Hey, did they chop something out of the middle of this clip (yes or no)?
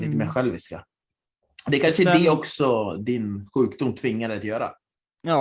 no